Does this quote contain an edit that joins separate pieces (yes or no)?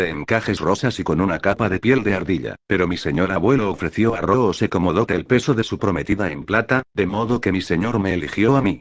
yes